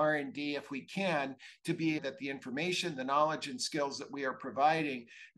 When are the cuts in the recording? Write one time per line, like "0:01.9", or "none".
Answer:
0:02.0